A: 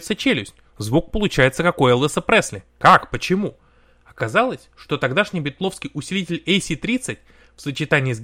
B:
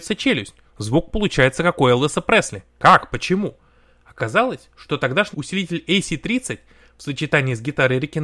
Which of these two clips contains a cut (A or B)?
B